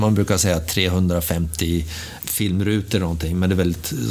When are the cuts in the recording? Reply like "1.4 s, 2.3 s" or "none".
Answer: 2.2 s